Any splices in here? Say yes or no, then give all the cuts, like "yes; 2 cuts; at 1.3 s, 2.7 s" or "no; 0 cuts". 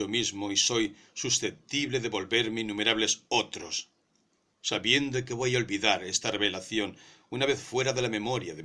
no; 0 cuts